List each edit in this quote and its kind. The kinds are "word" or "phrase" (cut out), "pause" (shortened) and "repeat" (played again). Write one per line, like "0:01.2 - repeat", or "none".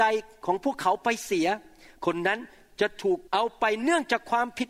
0:03.3 - pause